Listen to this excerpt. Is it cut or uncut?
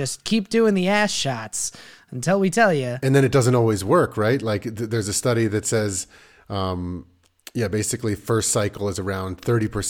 uncut